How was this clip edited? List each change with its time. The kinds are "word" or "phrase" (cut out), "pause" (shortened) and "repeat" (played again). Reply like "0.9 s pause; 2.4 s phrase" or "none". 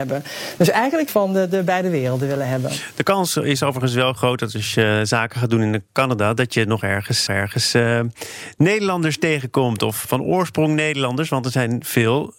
1.1 s phrase; 7.3 s repeat; 10.0 s word